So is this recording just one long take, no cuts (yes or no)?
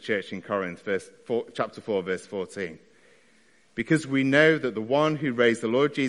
yes